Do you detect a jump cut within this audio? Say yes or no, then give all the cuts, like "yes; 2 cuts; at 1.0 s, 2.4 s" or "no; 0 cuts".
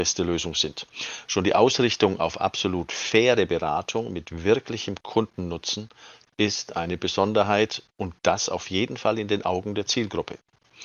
no; 0 cuts